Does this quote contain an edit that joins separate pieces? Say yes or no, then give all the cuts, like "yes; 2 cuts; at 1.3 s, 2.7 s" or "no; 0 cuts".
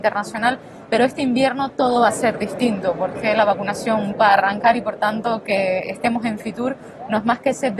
yes; 1 cut; at 4.1 s